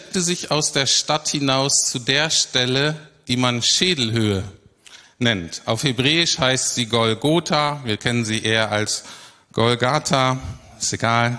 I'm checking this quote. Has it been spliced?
no; 0 cuts

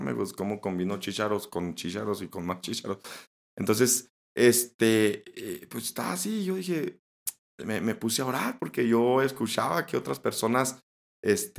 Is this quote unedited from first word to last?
yes; 0 cuts

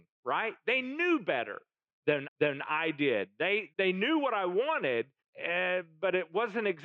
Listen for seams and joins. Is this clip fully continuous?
no; 3 cuts; at 2.2 s, 3.7 s, 5.2 s

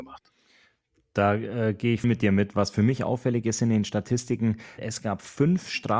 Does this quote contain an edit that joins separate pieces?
yes; 2 cuts; at 2.0 s, 4.8 s

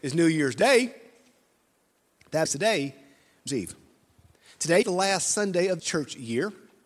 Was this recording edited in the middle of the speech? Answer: yes; 4 cuts; at 2.5 s, 3.5 s, 4.8 s, 5.8 s

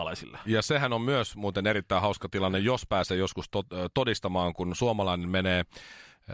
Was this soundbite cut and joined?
no; 0 cuts

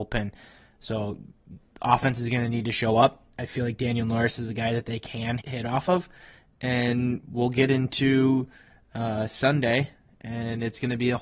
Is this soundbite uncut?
no; 1 cut; at 5.4 s

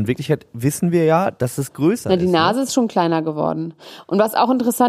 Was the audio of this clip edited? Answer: no; 0 cuts

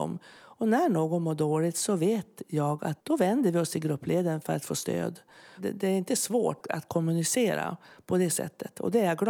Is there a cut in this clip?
yes; 2 cuts; at 3.0 s, 6.6 s

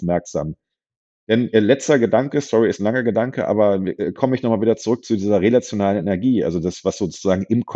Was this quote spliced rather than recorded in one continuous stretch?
no; 0 cuts

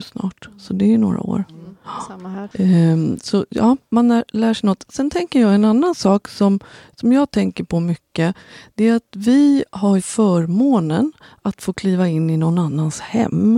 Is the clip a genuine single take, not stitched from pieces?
no; 1 cut; at 10.0 s

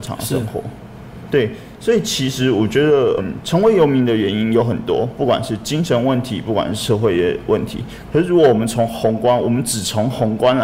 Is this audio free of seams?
no; 1 cut; at 3.2 s

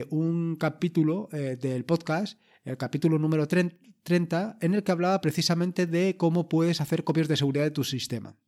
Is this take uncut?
yes; 0 cuts

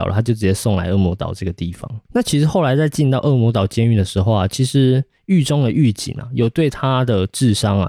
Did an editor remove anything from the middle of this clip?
yes; 1 cut; at 2.0 s

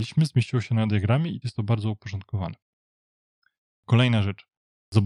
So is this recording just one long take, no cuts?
no; 1 cut; at 1.4 s

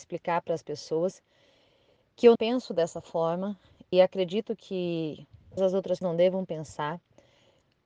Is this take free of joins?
no; 4 cuts; at 2.4 s, 3.9 s, 5.6 s, 6.0 s

